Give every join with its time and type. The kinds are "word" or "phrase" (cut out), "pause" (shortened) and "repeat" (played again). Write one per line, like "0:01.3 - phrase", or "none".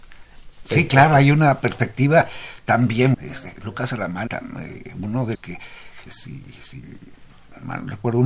0:03.1 - word
0:04.3 - word
0:05.3 - word
0:06.1 - word